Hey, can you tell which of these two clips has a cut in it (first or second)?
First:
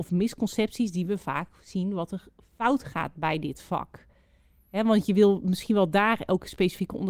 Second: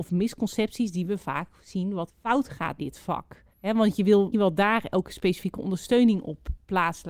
second